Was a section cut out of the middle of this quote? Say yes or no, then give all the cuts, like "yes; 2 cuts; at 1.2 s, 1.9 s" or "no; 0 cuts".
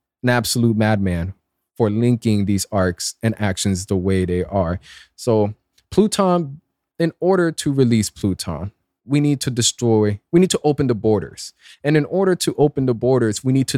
no; 0 cuts